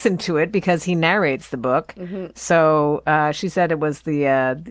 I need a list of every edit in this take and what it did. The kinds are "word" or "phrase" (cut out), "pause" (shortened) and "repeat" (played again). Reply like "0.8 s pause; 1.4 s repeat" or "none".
none